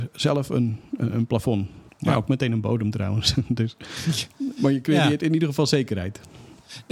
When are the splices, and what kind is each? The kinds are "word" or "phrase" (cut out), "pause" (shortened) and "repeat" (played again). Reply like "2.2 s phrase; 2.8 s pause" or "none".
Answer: 1.9 s pause

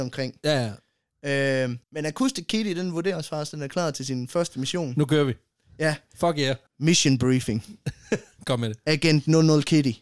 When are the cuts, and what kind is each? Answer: 1.8 s pause; 6.7 s pause

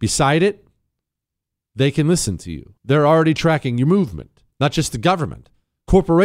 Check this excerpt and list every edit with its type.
2.8 s pause; 4.5 s pause

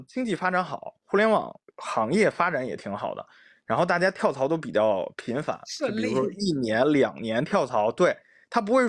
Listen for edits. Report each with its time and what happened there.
1.7 s pause

